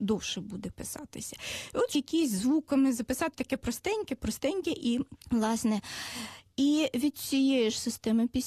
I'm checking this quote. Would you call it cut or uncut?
cut